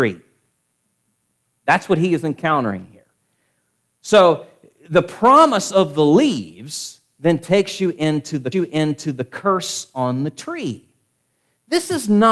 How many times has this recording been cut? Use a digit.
1